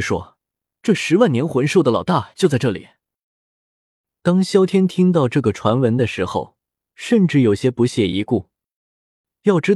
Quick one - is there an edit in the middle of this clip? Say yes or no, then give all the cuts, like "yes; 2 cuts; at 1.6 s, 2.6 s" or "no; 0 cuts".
no; 0 cuts